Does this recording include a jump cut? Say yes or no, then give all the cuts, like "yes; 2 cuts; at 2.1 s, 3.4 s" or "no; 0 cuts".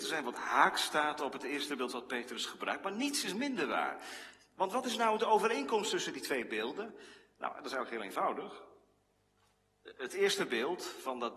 no; 0 cuts